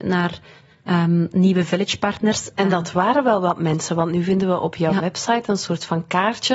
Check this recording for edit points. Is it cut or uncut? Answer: uncut